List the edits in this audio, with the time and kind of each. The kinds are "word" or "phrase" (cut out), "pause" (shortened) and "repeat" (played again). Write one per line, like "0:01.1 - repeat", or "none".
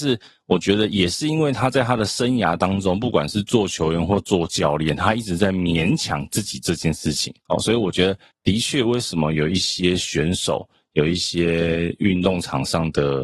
0:07.4 - pause

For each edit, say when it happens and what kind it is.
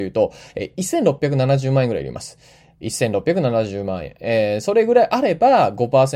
none

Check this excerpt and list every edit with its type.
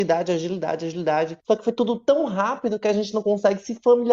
0:01.4 - pause

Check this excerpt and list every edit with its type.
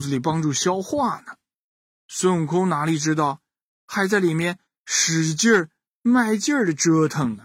none

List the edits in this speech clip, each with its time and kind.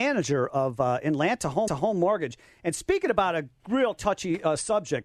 0:01.7 - repeat

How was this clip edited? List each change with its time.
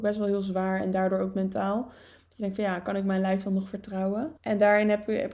0:04.4 - pause

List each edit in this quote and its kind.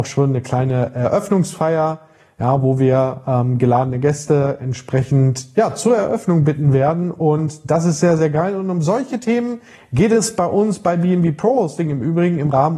none

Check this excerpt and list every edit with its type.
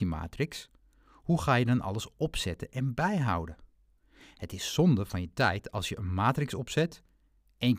none

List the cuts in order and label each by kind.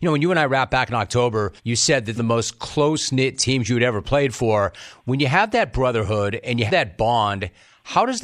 0:01.6 - pause
0:02.2 - phrase
0:06.7 - word

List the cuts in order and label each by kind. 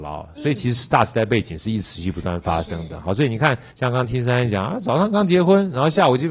0:03.7 - pause

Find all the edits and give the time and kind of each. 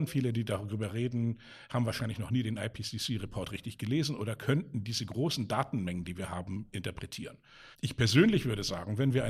0:07.7 - pause

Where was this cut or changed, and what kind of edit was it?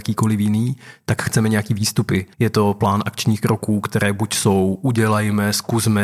0:02.3 - pause

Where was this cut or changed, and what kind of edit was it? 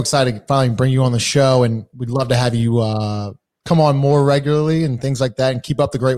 none

